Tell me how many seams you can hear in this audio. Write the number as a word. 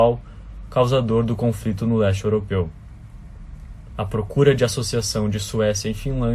zero